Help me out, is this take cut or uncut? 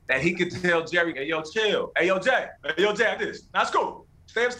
cut